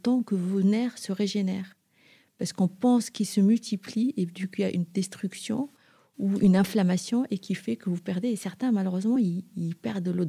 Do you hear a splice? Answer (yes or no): no